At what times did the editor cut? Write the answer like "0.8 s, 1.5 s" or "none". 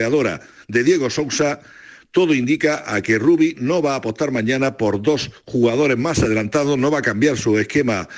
none